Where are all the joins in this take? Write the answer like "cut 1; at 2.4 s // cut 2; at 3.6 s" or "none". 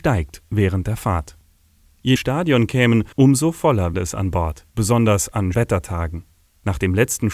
cut 1; at 2.2 s // cut 2; at 3.1 s // cut 3; at 3.9 s // cut 4; at 4.7 s // cut 5; at 5.5 s